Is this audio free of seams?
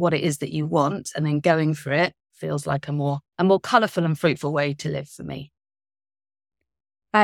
no; 1 cut; at 3.3 s

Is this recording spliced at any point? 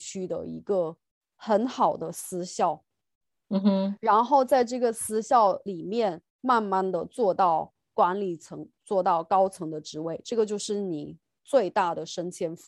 yes; 2 cuts; at 6.3 s, 7.8 s

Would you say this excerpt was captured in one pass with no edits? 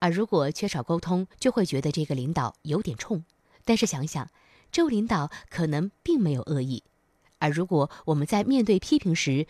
yes; 0 cuts

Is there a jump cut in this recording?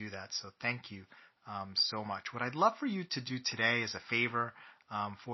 no; 0 cuts

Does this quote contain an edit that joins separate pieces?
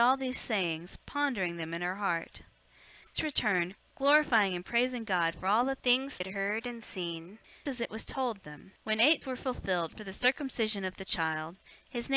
yes; 5 cuts; at 3.1 s, 6.2 s, 7.7 s, 8.8 s, 9.2 s

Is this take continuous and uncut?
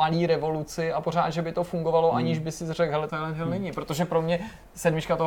no; 1 cut; at 3.1 s

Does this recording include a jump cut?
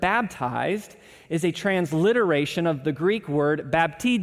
no; 0 cuts

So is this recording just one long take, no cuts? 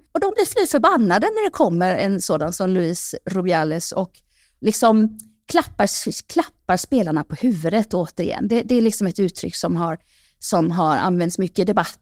yes; 0 cuts

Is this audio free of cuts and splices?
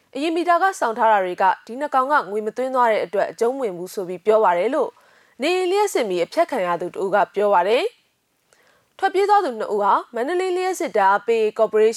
yes; 0 cuts

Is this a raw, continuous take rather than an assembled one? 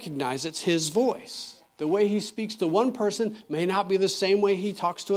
no; 1 cut; at 1.7 s

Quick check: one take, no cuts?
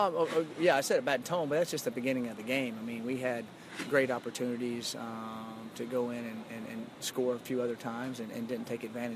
yes; 0 cuts

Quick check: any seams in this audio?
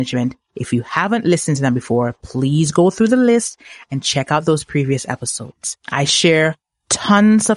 yes; 1 cut; at 5.8 s

